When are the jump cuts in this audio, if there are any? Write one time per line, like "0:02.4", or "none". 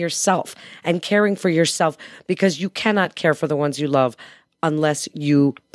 none